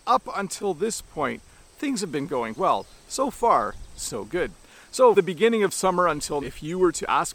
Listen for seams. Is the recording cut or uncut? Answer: cut